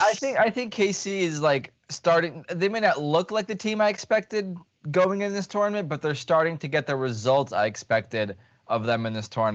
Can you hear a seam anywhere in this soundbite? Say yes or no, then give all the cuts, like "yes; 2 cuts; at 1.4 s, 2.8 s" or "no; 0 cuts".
no; 0 cuts